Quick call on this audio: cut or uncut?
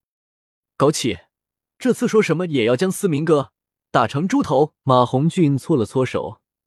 cut